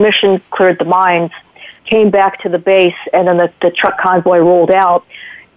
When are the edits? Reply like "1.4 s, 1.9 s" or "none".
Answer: 1.8 s